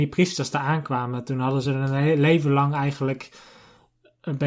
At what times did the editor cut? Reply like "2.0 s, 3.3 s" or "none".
none